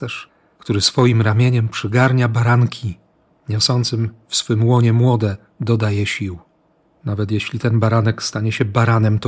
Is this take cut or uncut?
uncut